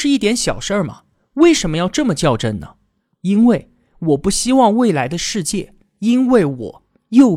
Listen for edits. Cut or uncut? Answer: uncut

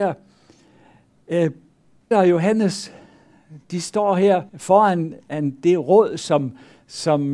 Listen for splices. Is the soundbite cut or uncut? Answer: cut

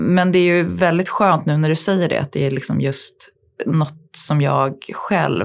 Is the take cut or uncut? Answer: uncut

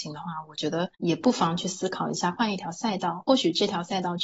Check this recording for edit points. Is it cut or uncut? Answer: cut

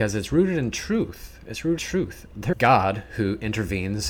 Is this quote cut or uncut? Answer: cut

